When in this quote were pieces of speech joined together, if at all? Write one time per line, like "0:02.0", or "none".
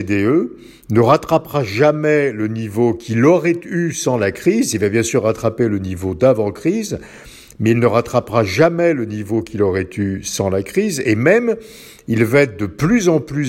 none